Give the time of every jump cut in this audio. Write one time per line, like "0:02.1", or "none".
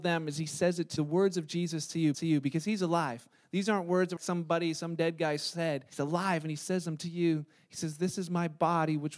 0:01.0
0:02.1
0:04.2
0:05.9